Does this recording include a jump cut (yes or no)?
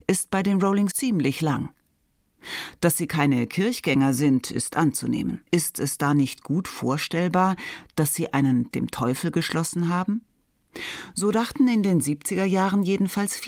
yes